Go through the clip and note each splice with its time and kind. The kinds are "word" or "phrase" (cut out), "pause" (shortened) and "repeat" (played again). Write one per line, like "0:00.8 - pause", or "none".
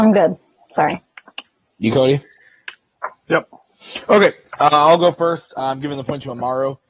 0:01.9 - word